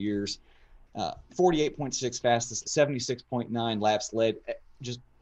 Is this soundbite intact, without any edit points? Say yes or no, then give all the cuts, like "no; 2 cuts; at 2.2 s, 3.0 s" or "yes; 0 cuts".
no; 2 cuts; at 1.3 s, 2.6 s